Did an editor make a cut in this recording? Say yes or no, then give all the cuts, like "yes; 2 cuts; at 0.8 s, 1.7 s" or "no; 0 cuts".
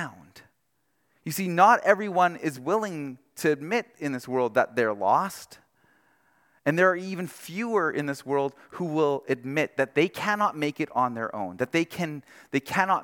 no; 0 cuts